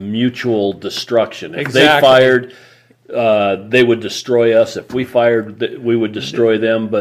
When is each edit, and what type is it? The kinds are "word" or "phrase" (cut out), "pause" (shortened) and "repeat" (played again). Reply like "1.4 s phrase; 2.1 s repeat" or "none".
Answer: none